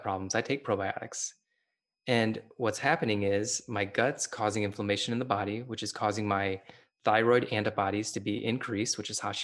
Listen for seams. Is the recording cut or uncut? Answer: uncut